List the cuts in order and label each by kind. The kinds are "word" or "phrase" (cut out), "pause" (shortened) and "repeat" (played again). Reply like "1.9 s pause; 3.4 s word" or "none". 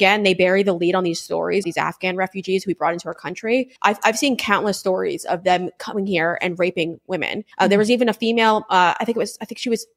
1.6 s word; 3.8 s pause; 7.5 s pause